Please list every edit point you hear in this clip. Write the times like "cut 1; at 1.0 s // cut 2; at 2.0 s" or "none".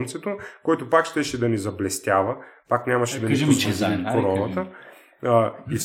cut 1; at 3.6 s